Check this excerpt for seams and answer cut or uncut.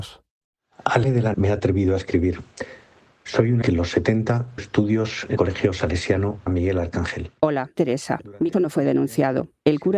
cut